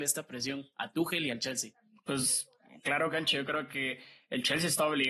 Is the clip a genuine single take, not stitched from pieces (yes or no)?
yes